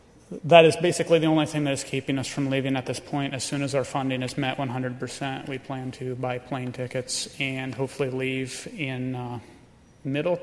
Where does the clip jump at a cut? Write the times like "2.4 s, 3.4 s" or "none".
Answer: none